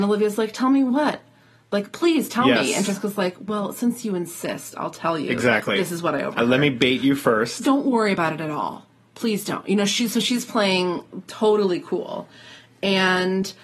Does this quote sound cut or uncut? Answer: uncut